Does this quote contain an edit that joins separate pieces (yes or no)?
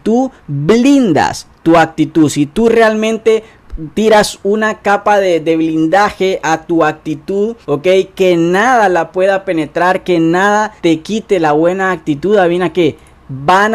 yes